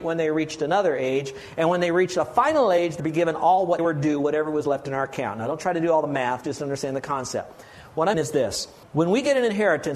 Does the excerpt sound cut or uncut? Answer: cut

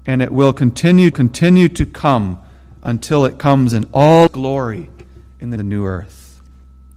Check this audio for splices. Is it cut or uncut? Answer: cut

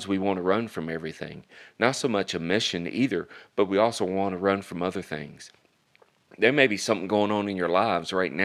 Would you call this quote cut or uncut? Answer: uncut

